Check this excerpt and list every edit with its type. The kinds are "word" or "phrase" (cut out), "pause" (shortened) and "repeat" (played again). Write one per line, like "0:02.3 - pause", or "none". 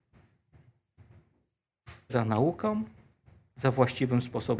0:02.1 - word